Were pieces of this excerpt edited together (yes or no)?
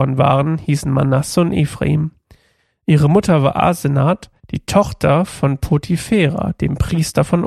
yes